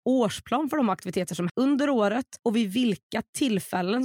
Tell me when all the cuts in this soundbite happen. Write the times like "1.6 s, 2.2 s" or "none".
1.5 s, 2.4 s